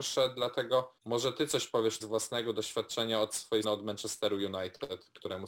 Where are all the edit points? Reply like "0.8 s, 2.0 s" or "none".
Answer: 1.0 s, 2.0 s, 3.6 s